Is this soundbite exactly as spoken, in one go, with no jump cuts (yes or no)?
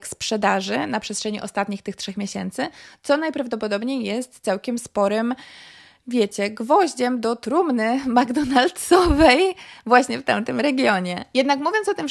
yes